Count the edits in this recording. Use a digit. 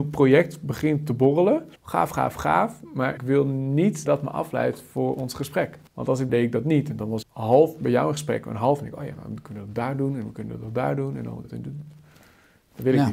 7